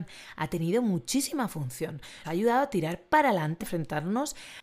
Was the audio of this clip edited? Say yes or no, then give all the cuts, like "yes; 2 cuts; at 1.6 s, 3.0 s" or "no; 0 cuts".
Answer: yes; 2 cuts; at 2.2 s, 3.6 s